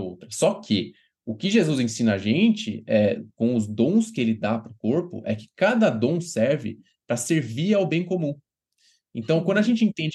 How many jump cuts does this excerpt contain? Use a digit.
0